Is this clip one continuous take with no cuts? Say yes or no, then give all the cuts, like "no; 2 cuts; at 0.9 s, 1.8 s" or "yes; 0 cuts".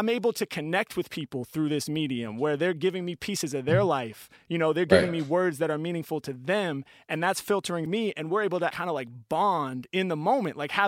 no; 2 cuts; at 7.9 s, 8.7 s